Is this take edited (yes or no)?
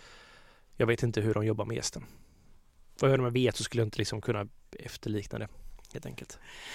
no